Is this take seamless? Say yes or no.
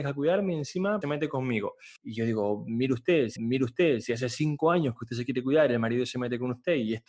no